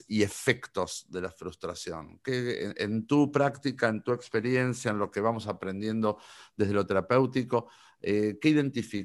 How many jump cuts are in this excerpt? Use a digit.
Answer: 0